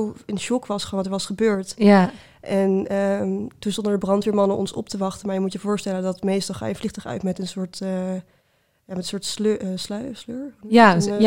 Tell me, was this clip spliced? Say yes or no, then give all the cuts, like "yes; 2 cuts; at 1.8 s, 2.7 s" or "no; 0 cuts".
no; 0 cuts